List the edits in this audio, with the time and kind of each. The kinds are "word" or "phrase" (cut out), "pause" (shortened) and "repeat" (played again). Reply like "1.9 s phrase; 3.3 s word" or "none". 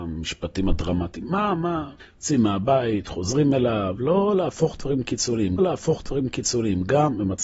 2.0 s pause; 5.6 s repeat